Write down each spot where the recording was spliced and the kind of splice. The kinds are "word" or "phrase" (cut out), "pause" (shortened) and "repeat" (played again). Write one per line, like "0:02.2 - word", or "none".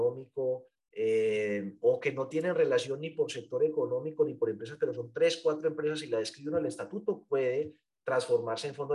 none

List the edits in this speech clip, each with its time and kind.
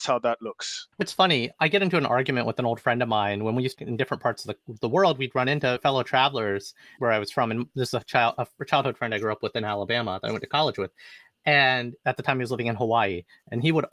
0:00.9 - pause
0:03.7 - phrase
0:07.0 - phrase

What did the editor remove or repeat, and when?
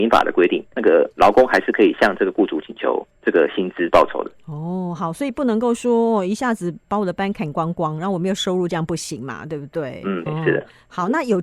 0:01.1 - pause
0:03.2 - pause
0:10.3 - word

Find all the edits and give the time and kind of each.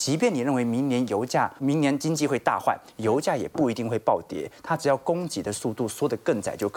0:01.6 - word

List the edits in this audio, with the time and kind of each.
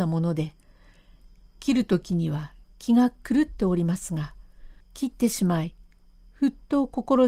0:04.8 - pause

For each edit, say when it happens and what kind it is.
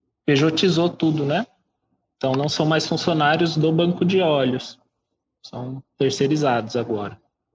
none

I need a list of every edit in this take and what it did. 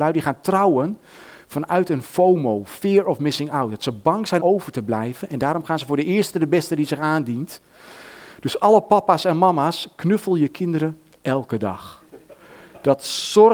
0:04.4 - word

